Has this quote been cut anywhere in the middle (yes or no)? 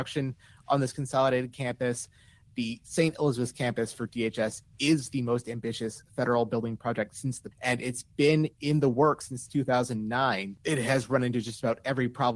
yes